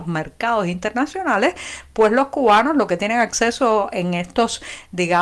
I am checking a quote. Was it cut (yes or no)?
no